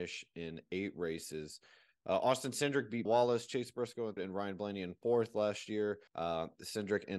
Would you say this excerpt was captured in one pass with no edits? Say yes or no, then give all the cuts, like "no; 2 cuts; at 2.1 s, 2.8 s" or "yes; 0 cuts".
no; 3 cuts; at 3.1 s, 4.2 s, 6.1 s